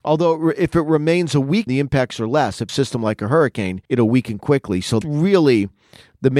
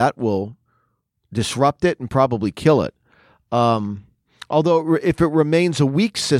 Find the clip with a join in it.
first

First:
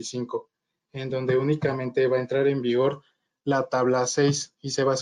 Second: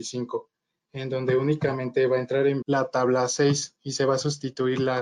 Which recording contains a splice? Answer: second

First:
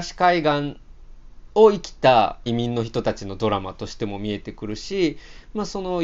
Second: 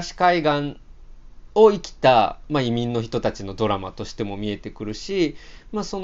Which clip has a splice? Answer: first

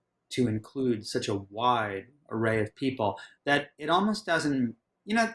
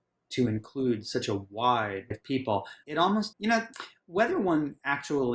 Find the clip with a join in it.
second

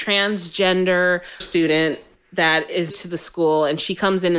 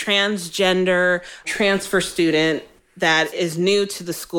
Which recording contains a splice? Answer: first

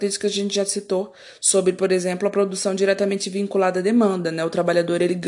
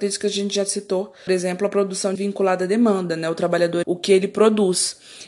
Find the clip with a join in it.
second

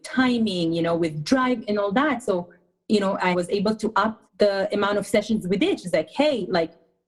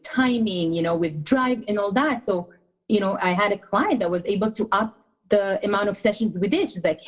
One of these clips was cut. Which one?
first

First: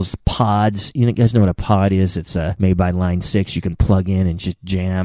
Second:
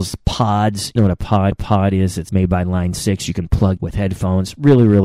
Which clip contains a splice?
second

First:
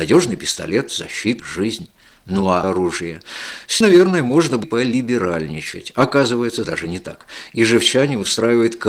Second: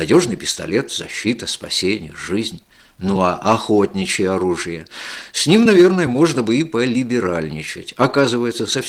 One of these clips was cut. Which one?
first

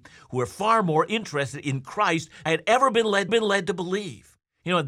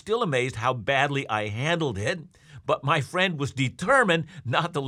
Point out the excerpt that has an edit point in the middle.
first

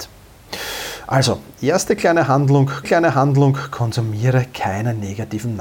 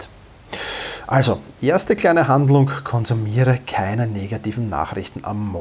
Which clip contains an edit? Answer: first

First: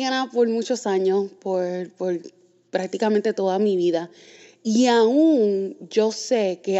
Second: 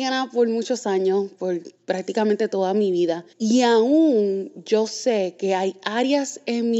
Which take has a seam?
second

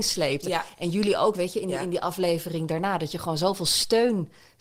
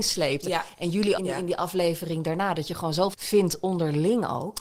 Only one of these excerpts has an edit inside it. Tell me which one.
second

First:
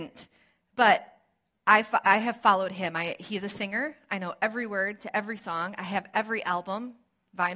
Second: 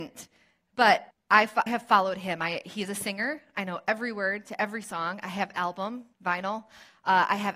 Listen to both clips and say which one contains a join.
second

